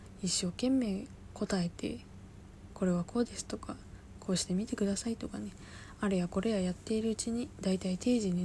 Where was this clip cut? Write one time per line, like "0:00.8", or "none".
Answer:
none